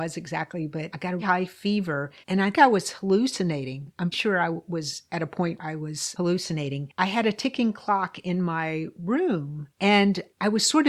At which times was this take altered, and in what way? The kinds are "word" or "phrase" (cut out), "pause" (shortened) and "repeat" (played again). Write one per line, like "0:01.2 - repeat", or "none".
0:01.2 - word
0:02.2 - pause
0:02.5 - word
0:04.1 - word
0:05.6 - word
0:07.0 - word